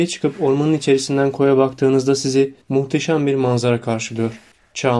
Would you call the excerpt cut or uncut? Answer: cut